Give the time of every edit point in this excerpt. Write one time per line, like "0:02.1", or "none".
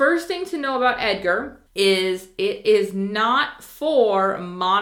0:01.7